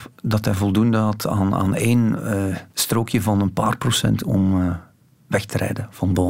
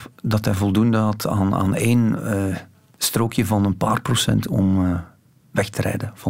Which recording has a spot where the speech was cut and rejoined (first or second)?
first